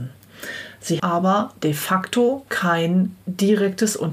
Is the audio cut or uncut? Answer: cut